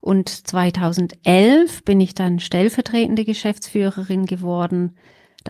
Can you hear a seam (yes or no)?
no